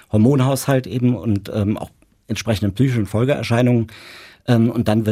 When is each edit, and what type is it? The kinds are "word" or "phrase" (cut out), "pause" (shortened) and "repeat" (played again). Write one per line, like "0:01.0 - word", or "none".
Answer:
none